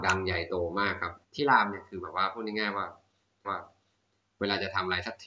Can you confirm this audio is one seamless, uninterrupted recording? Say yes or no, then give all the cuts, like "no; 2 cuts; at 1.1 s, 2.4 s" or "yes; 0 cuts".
no; 2 cuts; at 1.2 s, 3.4 s